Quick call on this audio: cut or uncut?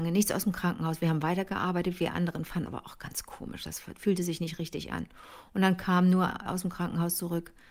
cut